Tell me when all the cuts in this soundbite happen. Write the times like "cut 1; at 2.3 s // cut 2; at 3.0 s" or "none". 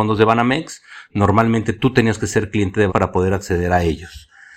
cut 1; at 2.9 s